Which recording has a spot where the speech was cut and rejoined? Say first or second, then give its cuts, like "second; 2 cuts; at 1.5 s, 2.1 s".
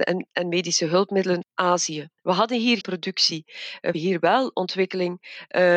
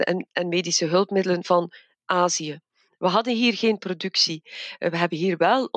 first; 4 cuts; at 1.4 s, 2.2 s, 2.8 s, 3.9 s